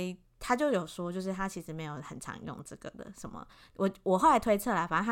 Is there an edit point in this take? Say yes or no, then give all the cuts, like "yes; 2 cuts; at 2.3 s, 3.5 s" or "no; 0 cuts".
no; 0 cuts